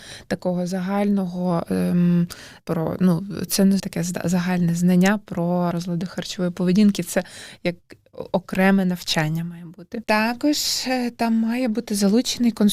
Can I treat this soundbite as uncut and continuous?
no; 4 cuts; at 2.6 s, 3.5 s, 3.8 s, 5.7 s

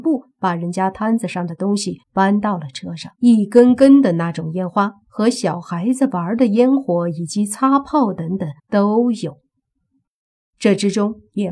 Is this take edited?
yes; 3 cuts; at 2.0 s, 3.1 s, 8.6 s

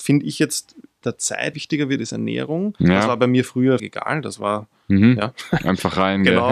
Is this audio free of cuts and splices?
no; 3 cuts; at 1.0 s, 1.5 s, 3.8 s

